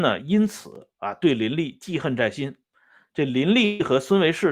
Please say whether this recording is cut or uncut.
cut